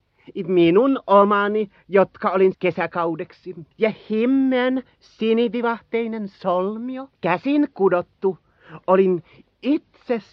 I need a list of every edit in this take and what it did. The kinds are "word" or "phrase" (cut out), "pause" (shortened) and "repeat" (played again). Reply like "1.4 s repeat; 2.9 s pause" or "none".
2.5 s phrase; 3.7 s pause; 7.1 s pause